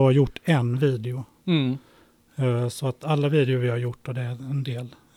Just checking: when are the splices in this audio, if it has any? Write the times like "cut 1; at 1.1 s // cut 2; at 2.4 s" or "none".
none